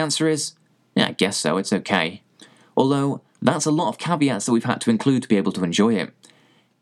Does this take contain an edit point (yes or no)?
no